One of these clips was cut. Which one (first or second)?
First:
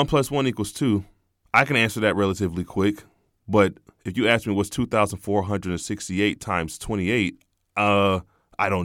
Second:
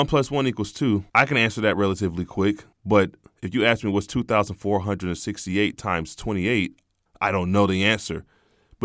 second